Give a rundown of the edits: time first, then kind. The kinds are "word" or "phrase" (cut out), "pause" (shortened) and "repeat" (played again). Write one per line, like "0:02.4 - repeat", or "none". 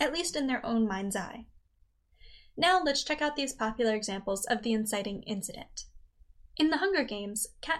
none